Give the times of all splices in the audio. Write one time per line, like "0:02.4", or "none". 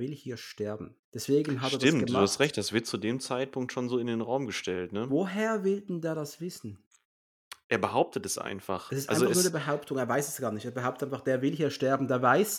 0:01.0